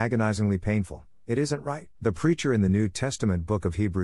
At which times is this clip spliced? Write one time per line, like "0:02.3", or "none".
0:01.9